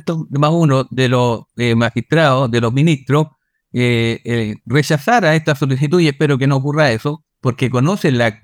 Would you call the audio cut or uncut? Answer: uncut